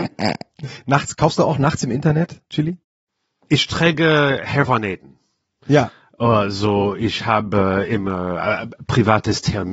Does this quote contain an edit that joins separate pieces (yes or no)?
no